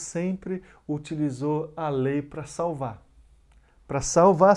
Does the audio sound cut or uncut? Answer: uncut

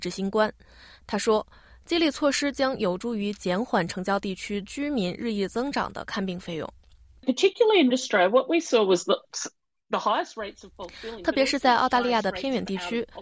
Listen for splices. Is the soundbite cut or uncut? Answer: cut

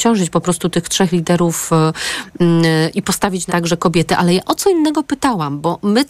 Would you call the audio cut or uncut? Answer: cut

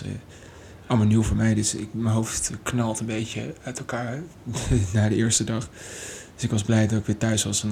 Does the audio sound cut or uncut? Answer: uncut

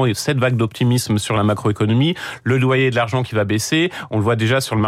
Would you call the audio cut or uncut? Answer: uncut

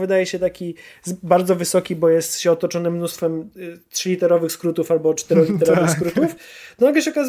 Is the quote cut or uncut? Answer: uncut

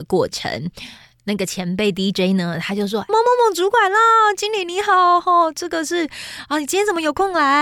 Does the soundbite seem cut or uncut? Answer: cut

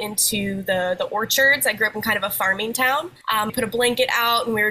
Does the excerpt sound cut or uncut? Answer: cut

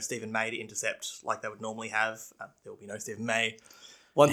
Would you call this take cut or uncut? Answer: uncut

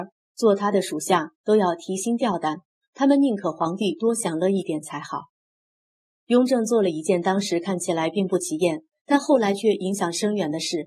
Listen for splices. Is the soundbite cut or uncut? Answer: uncut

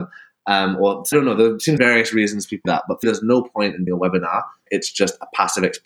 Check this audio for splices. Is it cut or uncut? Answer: cut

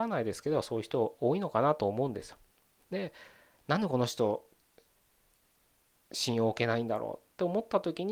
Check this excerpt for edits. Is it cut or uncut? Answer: uncut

